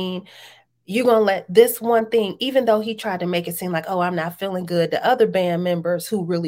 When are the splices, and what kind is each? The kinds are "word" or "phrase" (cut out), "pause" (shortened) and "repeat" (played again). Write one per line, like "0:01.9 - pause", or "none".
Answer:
none